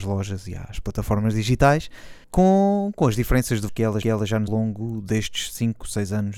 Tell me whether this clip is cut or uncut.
cut